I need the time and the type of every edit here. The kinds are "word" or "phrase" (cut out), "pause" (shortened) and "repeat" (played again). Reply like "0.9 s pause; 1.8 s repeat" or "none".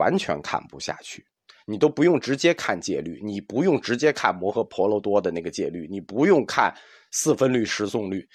none